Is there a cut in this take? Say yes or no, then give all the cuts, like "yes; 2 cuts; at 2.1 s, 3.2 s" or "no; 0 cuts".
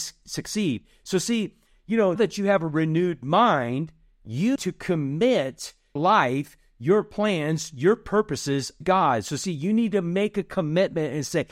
yes; 4 cuts; at 2.2 s, 4.6 s, 6.0 s, 8.8 s